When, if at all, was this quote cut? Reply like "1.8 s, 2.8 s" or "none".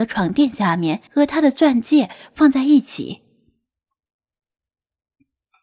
1.1 s

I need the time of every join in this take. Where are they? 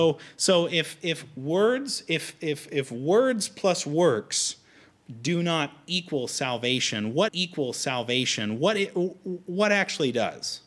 7.3 s

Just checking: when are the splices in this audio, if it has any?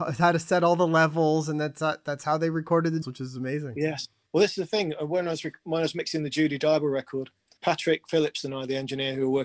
3.0 s, 4.3 s, 7.6 s

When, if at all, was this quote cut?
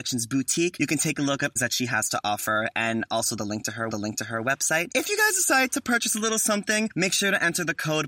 1.6 s, 3.9 s

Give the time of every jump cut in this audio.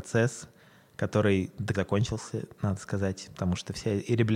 1.7 s

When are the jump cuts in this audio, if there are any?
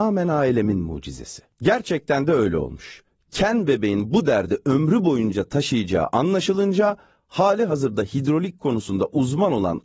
1.5 s

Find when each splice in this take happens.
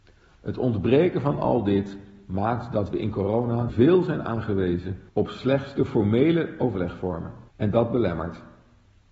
3.7 s, 5.1 s, 7.5 s

